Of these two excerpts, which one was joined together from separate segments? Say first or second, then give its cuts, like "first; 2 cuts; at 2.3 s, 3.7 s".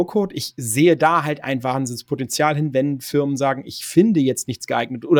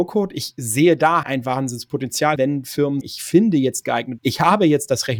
second; 5 cuts; at 1.2 s, 2.4 s, 3.0 s, 3.8 s, 4.2 s